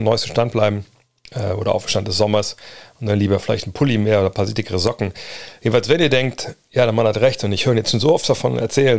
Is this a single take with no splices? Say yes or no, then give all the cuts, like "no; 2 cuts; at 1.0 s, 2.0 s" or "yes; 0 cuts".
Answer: yes; 0 cuts